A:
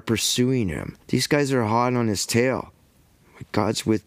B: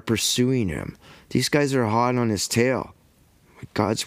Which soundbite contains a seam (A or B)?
A